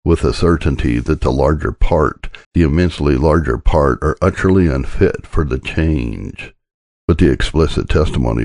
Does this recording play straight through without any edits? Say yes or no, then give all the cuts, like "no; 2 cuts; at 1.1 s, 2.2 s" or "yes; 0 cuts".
no; 1 cut; at 2.4 s